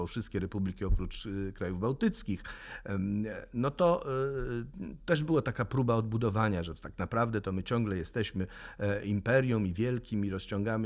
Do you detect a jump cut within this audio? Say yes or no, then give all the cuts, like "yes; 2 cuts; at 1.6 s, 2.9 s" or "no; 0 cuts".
no; 0 cuts